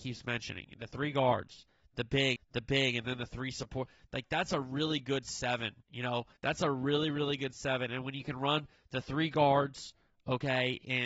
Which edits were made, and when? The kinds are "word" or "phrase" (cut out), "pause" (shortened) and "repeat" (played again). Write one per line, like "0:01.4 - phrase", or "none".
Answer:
0:02.4 - repeat
0:05.8 - pause
0:06.4 - pause